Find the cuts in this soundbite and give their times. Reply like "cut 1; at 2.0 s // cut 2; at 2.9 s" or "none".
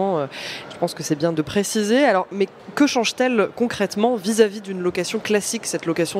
cut 1; at 1.3 s